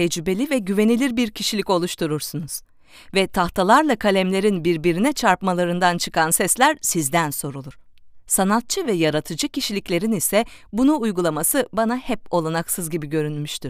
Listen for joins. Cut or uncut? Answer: uncut